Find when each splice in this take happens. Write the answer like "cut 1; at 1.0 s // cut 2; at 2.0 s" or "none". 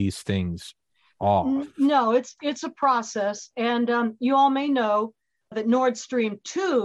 cut 1; at 2.4 s // cut 2; at 5.5 s

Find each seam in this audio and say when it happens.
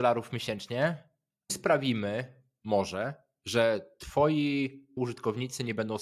cut 1; at 1.5 s // cut 2; at 5.0 s

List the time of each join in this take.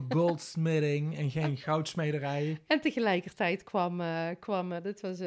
none

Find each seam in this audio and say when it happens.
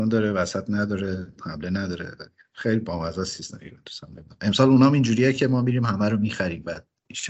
none

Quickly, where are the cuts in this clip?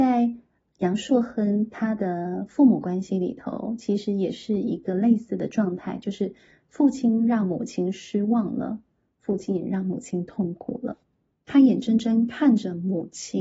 none

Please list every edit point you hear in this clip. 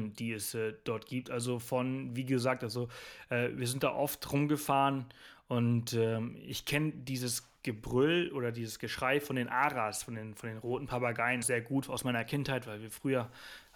cut 1; at 11.4 s

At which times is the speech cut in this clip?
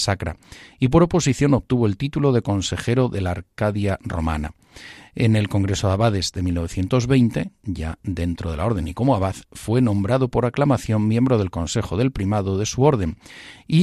none

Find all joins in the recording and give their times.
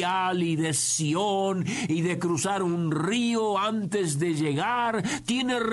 none

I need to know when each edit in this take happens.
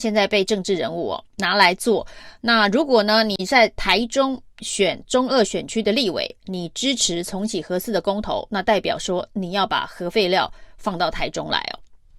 cut 1; at 1.3 s

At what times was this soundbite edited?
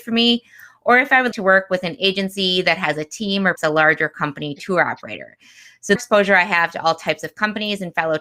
cut 1; at 1.3 s // cut 2; at 3.6 s // cut 3; at 6.0 s

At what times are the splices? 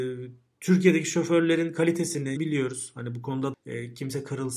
cut 1; at 2.4 s // cut 2; at 3.5 s

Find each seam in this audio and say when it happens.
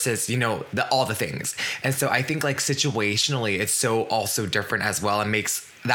none

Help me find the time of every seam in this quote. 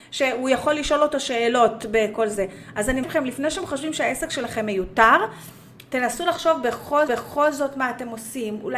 cut 1; at 3.0 s // cut 2; at 7.1 s

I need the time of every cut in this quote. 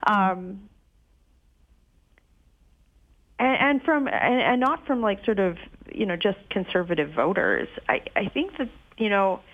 cut 1; at 6.5 s

